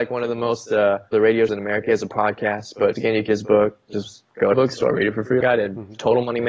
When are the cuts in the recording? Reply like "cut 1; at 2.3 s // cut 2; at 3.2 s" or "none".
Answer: cut 1; at 1.1 s // cut 2; at 1.5 s // cut 3; at 3.0 s // cut 4; at 3.3 s // cut 5; at 4.5 s // cut 6; at 5.4 s